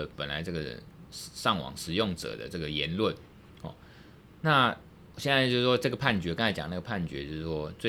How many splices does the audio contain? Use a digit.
0